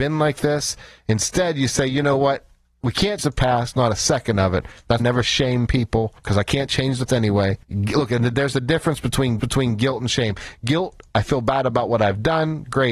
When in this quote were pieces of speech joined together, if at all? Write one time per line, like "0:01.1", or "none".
0:03.2
0:05.0
0:06.2
0:07.1
0:07.6
0:09.4